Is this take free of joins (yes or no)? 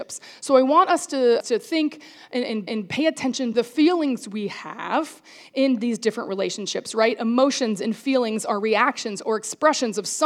no